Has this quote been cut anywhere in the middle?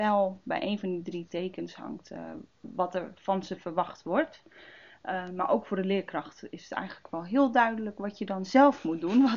no; 0 cuts

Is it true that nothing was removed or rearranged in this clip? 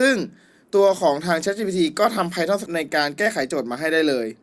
no; 1 cut; at 2.7 s

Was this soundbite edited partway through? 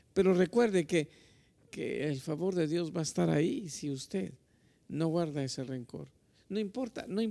no; 0 cuts

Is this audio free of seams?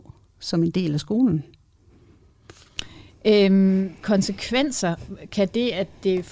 no; 1 cut; at 4.0 s

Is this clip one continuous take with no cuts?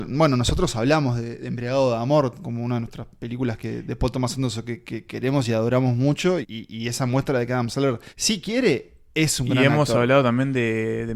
no; 2 cuts; at 6.4 s, 8.1 s

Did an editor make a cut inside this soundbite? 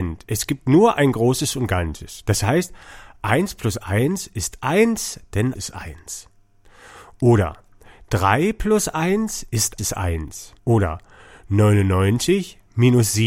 yes; 3 cuts; at 5.6 s, 9.8 s, 10.6 s

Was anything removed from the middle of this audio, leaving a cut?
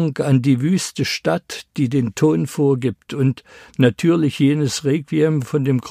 no; 0 cuts

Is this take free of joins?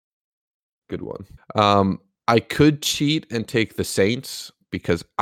no; 1 cut; at 1.4 s

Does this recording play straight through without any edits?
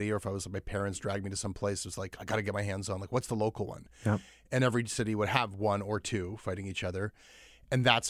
yes; 0 cuts

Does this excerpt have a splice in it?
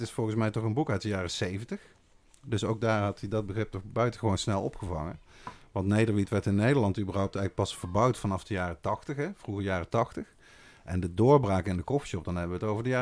no; 0 cuts

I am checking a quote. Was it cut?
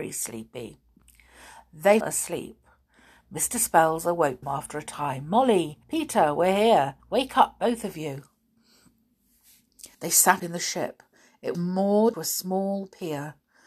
yes; 8 cuts; at 2.0 s, 4.4 s, 5.8 s, 7.0 s, 9.9 s, 10.4 s, 11.5 s, 12.1 s

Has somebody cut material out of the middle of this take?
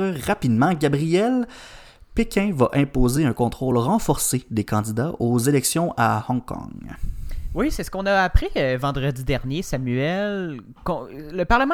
no; 0 cuts

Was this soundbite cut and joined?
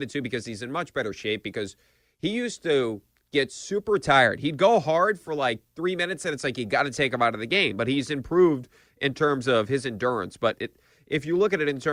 no; 0 cuts

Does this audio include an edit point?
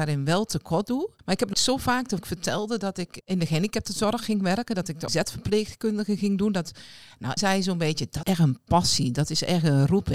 yes; 7 cuts; at 1.2 s, 1.5 s, 2.2 s, 3.2 s, 5.1 s, 7.4 s, 8.2 s

